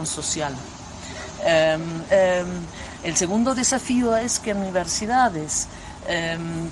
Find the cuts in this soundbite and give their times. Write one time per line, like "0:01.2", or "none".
0:02.1